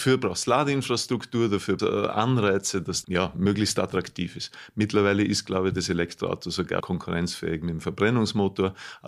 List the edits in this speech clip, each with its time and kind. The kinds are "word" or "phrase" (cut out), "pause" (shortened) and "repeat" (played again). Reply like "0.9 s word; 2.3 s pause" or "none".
1.8 s phrase; 3.0 s word; 6.8 s word